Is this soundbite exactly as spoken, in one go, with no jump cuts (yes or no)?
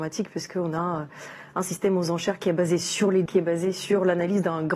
no